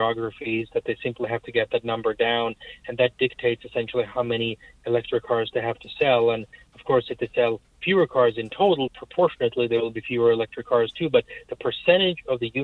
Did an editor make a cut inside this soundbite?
yes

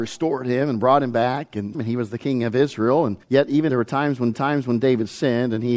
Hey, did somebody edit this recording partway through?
yes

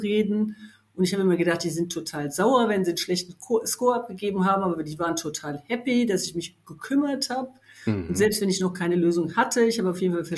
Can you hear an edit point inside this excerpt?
no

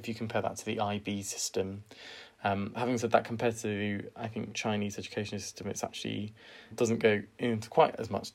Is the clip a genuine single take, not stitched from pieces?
no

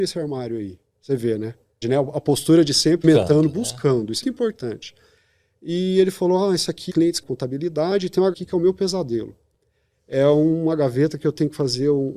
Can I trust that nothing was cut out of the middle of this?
no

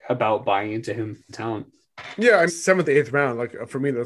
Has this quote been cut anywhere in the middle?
yes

